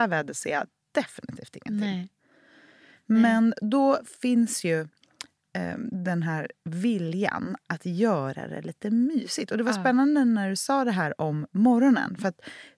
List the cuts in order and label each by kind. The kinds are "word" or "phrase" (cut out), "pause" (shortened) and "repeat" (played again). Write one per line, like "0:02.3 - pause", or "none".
none